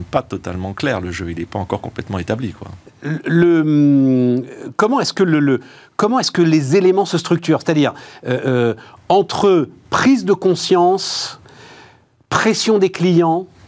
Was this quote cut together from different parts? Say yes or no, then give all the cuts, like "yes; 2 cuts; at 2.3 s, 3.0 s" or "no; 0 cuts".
no; 0 cuts